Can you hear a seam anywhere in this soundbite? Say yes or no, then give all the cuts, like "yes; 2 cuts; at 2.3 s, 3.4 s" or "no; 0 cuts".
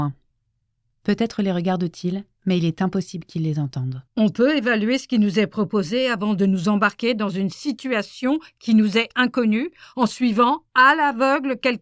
yes; 2 cuts; at 2.3 s, 4.1 s